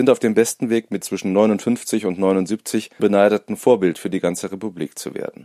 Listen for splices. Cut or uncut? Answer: cut